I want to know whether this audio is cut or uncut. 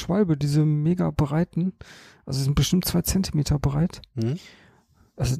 uncut